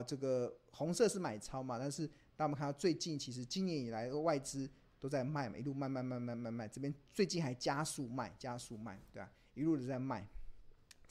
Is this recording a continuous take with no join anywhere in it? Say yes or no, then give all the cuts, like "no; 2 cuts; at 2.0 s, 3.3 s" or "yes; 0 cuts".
yes; 0 cuts